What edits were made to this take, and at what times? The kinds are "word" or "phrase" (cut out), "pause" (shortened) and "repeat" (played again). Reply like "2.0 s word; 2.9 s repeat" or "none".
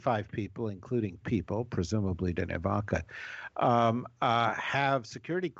1.2 s word; 2.3 s word